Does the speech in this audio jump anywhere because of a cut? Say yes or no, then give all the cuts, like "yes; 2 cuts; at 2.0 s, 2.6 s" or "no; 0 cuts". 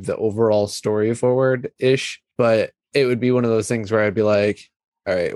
no; 0 cuts